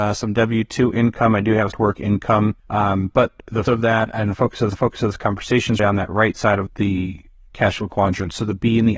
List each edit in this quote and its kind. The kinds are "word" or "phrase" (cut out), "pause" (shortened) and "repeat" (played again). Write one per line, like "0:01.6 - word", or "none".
0:01.7 - phrase
0:02.6 - pause
0:03.7 - word
0:04.7 - repeat
0:05.8 - word
0:06.7 - word